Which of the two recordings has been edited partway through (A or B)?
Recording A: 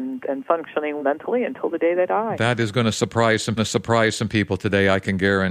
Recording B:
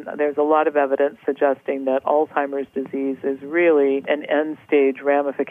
A